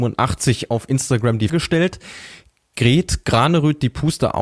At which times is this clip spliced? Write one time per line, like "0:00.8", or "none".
0:01.5